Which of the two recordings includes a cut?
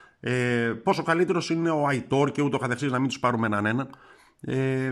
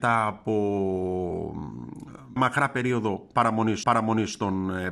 second; 2 cuts; at 2.4 s, 3.8 s

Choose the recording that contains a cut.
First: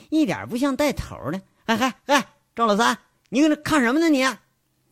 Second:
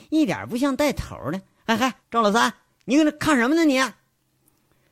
second; 1 cut; at 2.0 s

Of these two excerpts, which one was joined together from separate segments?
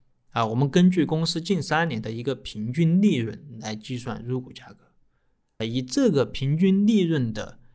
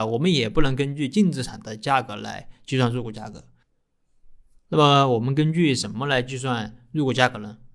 first; 1 cut; at 5.6 s

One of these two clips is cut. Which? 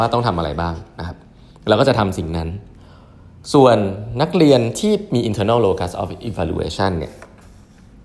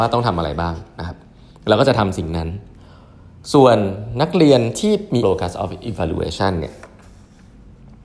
second; 1 cut; at 5.2 s

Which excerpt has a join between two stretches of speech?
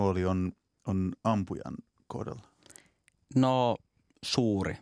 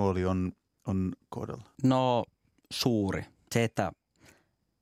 second; 3 cuts; at 1.2 s, 1.7 s, 3.5 s

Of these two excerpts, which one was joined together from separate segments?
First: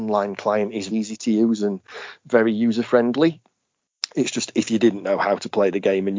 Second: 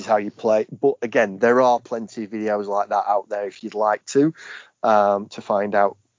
first; 1 cut; at 0.9 s

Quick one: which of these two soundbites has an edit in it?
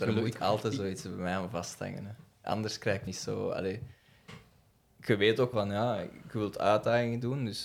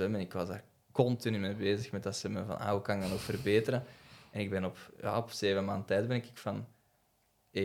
first; 2 cuts; at 3.1 s, 5.5 s

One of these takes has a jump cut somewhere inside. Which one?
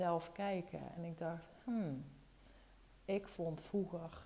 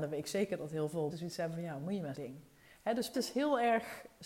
second; 3 cuts; at 1.1 s, 2.1 s, 3.1 s

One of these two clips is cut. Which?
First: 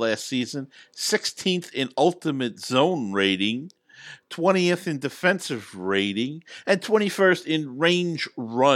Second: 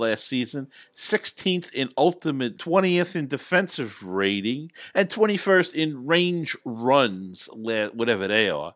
second; 1 cut; at 2.6 s

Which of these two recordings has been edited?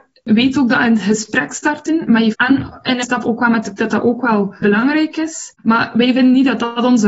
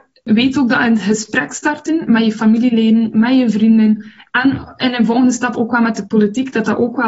first; 4 cuts; at 2.3 s, 3.0 s, 3.8 s, 4.6 s

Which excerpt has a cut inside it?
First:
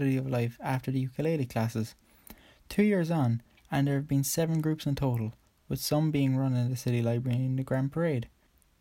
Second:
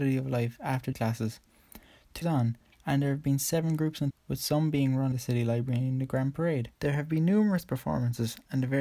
second; 5 cuts; at 0.9 s, 2.2 s, 4.1 s, 5.1 s, 6.7 s

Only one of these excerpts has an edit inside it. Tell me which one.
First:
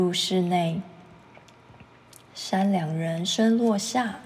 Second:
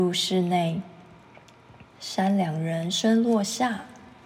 second; 1 cut; at 1.9 s

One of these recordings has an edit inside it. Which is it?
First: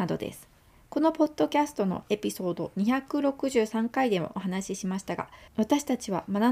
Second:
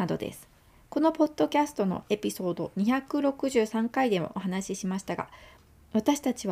first; 1 cut; at 5.5 s

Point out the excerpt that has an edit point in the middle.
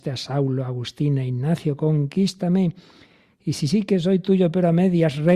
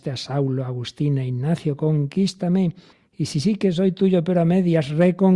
second; 1 cut; at 2.9 s

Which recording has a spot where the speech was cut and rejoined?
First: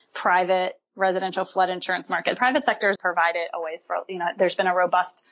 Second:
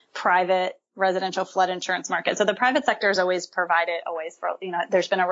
first; 2 cuts; at 2.4 s, 3.0 s

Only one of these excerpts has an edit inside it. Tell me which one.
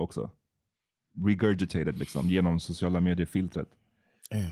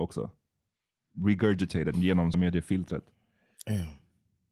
second; 2 cuts; at 1.9 s, 2.3 s

